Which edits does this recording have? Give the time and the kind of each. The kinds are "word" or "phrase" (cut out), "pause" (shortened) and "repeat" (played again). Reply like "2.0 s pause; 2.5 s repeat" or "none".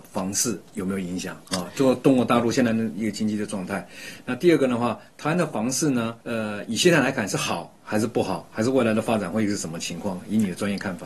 1.5 s pause; 6.2 s pause